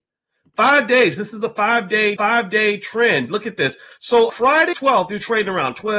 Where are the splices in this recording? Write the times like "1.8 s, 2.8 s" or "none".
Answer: 2.2 s, 4.3 s, 4.7 s